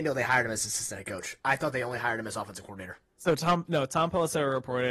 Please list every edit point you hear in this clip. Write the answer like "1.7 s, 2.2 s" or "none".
3.1 s